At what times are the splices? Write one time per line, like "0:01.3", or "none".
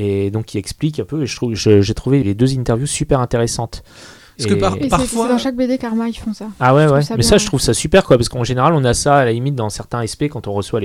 0:02.2